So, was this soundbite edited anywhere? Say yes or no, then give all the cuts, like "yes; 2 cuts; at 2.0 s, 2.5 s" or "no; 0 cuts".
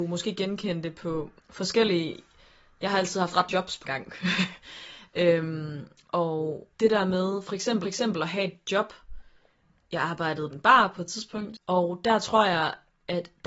yes; 6 cuts; at 1.4 s, 3.5 s, 3.8 s, 6.7 s, 7.8 s, 10.5 s